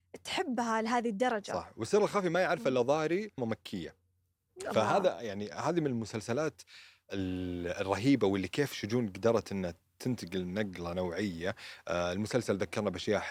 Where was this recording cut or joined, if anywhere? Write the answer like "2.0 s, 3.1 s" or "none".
3.4 s